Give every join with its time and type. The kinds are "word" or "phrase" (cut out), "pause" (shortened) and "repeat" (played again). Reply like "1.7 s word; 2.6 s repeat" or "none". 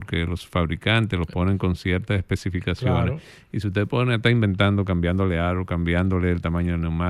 none